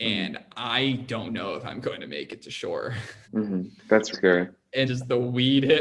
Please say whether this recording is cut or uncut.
cut